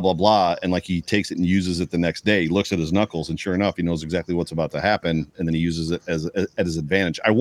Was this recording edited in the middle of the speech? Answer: no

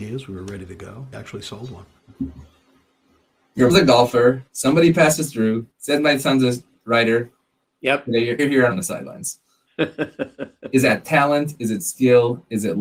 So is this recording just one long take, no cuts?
no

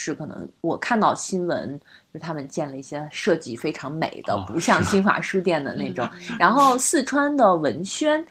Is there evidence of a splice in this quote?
no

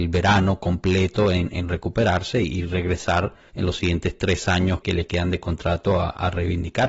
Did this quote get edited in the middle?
yes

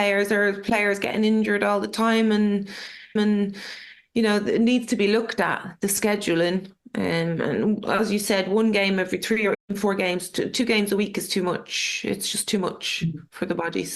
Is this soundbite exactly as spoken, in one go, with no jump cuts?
no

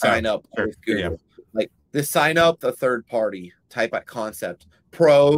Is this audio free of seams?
no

